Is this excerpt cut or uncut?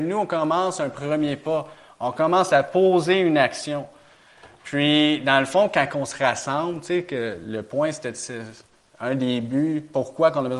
uncut